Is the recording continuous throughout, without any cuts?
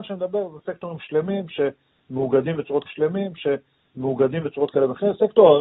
no; 1 cut; at 2.8 s

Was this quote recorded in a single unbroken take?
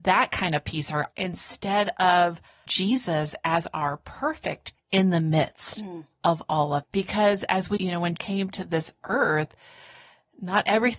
no; 6 cuts; at 1.1 s, 2.7 s, 4.7 s, 6.8 s, 7.8 s, 8.2 s

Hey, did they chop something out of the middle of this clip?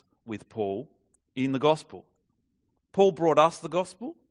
no; 0 cuts

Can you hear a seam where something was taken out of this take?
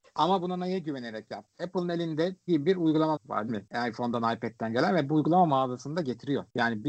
yes; 3 cuts; at 2.5 s, 3.2 s, 3.5 s

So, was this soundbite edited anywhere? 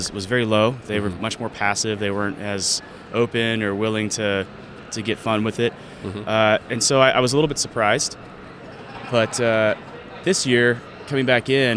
no; 0 cuts

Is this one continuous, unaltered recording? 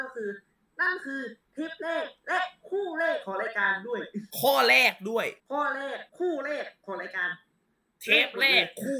no; 3 cuts; at 4.3 s, 5.4 s, 6.1 s

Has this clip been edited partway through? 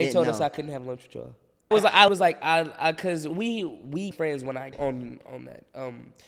yes; 5 cuts; at 1.7 s, 2.1 s, 3.3 s, 4.1 s, 4.7 s

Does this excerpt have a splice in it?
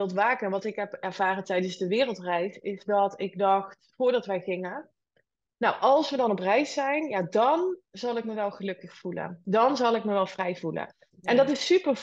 no; 0 cuts

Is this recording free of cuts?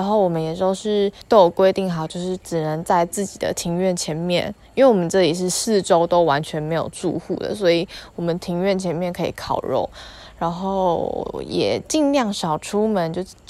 no; 1 cut; at 1.2 s

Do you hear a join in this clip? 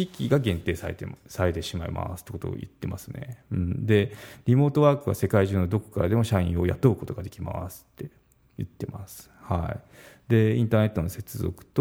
no; 0 cuts

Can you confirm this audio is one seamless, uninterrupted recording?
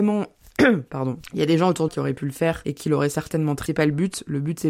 no; 2 cuts; at 1.9 s, 3.7 s

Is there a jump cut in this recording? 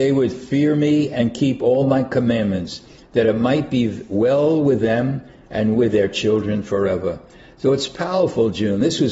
no; 0 cuts

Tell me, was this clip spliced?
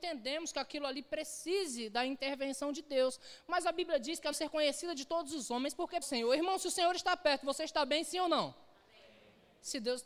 yes; 2 cuts; at 4.3 s, 6.0 s

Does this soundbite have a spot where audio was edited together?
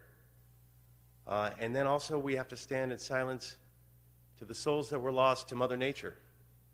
no; 0 cuts

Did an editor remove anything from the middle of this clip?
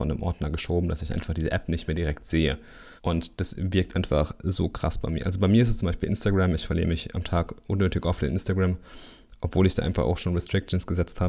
yes; 1 cut; at 3.0 s

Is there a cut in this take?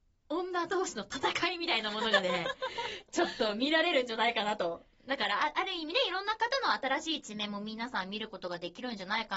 no; 0 cuts

